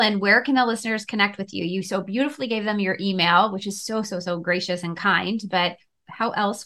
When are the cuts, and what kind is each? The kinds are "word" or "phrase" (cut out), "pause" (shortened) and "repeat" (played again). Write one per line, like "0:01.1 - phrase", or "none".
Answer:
none